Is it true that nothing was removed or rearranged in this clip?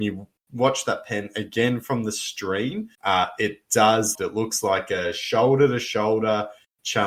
no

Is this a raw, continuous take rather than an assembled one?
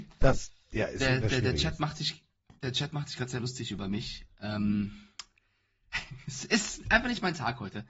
yes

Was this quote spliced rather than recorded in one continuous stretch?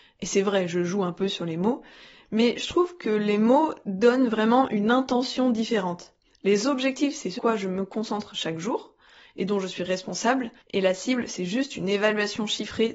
yes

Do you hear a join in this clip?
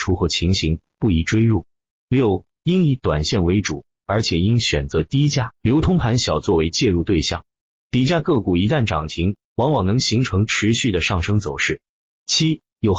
no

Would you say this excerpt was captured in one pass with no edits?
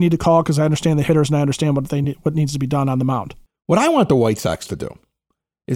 yes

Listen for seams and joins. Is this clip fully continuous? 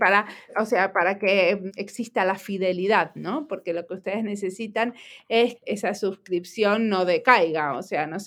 no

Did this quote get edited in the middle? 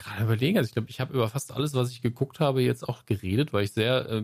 no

